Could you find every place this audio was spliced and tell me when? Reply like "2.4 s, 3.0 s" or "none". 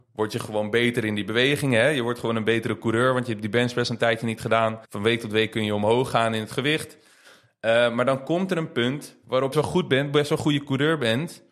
4.8 s, 9.5 s